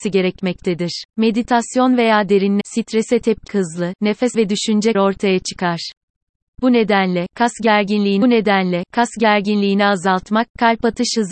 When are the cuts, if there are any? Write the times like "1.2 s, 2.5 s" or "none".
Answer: 1.1 s, 2.6 s, 3.5 s, 4.3 s, 4.9 s, 8.2 s